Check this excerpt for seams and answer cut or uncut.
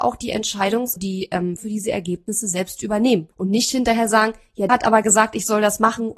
cut